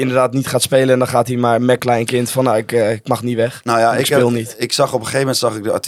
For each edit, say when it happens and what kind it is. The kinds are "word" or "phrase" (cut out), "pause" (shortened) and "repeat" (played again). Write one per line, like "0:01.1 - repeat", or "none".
0:01.8 - phrase